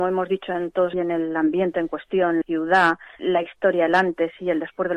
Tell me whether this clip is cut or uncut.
cut